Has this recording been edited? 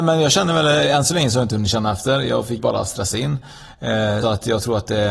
yes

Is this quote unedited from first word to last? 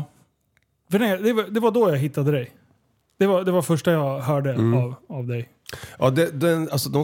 yes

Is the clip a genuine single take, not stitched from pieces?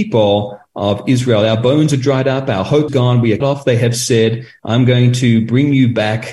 no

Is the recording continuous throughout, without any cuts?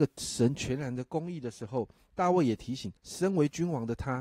no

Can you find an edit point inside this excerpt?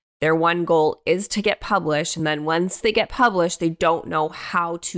no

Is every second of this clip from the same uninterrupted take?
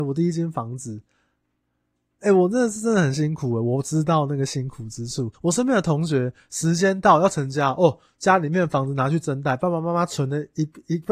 no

